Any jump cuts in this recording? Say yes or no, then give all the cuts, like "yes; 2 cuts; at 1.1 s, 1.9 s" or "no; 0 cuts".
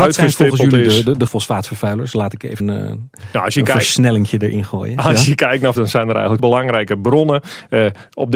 yes; 4 cuts; at 1.3 s, 2.6 s, 5.7 s, 6.4 s